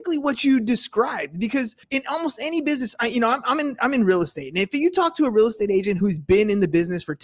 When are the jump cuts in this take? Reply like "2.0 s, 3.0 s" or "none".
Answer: 1.8 s